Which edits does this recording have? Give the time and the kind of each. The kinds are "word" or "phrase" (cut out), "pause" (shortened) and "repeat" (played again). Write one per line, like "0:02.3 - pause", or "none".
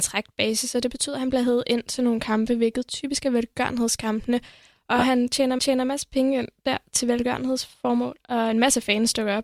0:05.6 - repeat